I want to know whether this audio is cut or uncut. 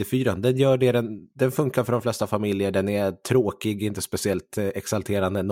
cut